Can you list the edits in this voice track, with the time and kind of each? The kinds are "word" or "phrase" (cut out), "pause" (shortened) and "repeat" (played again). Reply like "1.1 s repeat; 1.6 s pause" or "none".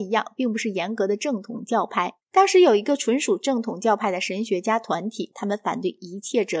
2.2 s pause